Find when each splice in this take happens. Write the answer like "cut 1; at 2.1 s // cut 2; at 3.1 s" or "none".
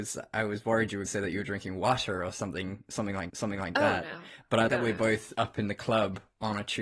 cut 1; at 1.1 s // cut 2; at 3.3 s // cut 3; at 4.7 s // cut 4; at 5.3 s

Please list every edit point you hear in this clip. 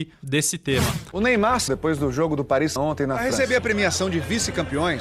cut 1; at 1.7 s // cut 2; at 2.8 s

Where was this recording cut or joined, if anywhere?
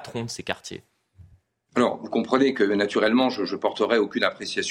none

